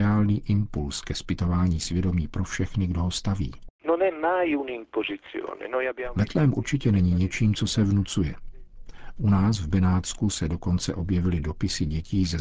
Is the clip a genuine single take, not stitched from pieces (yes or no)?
yes